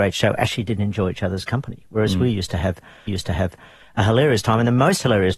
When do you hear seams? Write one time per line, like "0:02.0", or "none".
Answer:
0:03.1